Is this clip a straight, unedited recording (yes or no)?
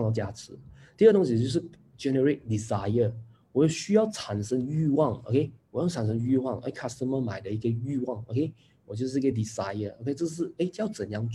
yes